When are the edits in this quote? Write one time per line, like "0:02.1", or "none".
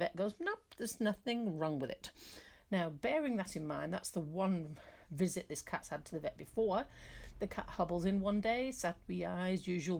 0:05.0